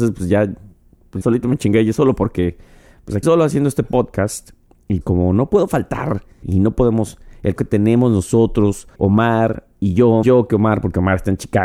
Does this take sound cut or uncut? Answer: cut